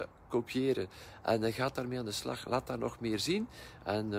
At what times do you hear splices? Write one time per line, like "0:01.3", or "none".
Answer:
none